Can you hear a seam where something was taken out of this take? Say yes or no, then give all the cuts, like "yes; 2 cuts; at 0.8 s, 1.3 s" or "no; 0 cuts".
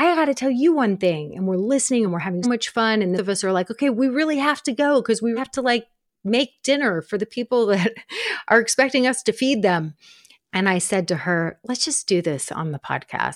yes; 4 cuts; at 2.1 s, 2.4 s, 3.2 s, 5.4 s